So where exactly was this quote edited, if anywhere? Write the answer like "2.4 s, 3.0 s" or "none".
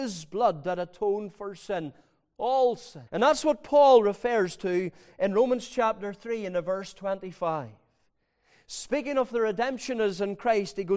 3.1 s